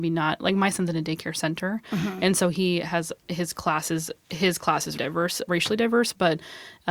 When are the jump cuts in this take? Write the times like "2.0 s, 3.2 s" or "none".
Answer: 5.0 s, 5.5 s